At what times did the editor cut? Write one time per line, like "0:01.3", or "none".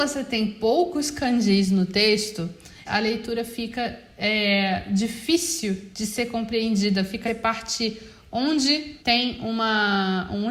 0:02.8
0:05.9
0:07.3
0:09.0